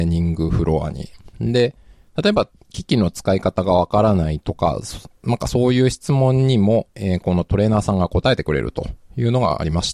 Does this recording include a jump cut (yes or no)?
no